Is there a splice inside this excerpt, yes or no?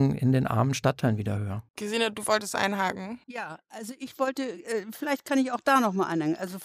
yes